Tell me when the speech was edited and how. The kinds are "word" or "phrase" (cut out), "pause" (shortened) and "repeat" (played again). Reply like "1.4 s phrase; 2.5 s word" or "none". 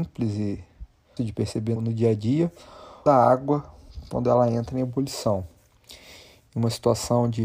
1.2 s word; 1.8 s word; 3.1 s phrase